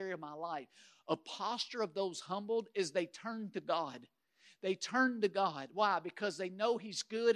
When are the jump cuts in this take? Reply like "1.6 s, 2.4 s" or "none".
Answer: none